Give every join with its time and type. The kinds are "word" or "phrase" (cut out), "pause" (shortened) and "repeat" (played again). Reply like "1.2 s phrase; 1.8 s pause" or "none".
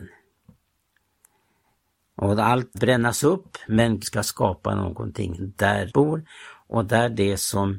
2.7 s word; 4.0 s word; 5.4 s word; 5.9 s word